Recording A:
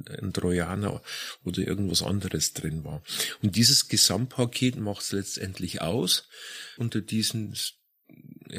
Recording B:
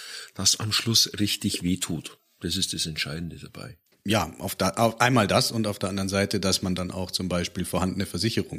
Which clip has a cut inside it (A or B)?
A